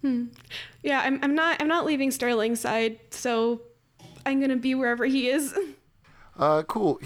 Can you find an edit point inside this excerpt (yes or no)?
no